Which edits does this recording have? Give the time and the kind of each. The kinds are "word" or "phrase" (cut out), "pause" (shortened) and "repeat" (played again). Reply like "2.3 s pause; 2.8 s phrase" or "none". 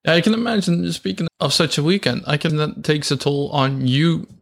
1.3 s word; 2.5 s word; 2.8 s word